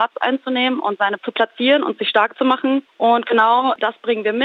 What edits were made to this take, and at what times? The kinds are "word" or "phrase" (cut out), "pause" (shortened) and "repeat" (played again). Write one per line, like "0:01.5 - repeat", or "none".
0:01.2 - word